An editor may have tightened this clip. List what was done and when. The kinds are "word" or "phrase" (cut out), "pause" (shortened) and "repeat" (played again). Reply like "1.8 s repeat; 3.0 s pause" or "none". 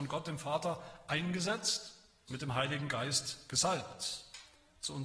2.3 s word

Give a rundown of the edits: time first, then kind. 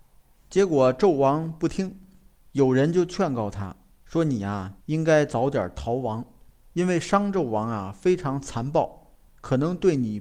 4.8 s pause

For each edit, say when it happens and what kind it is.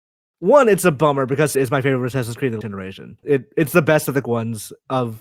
1.5 s word; 2.6 s word; 3.2 s word; 4.2 s word

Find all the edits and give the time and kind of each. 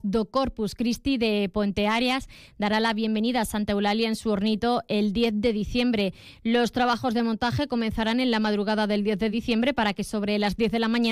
none

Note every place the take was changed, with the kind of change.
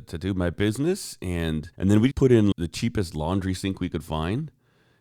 1.7 s pause; 2.1 s word; 2.5 s phrase

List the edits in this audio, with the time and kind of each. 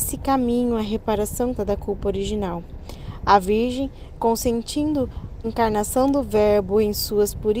1.6 s word; 5.4 s word

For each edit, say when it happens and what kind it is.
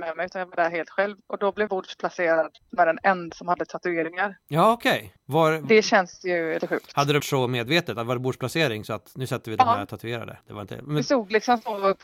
1.7 s word; 2.7 s word; 3.3 s word; 5.2 s pause; 6.6 s word; 7.2 s word; 10.4 s pause

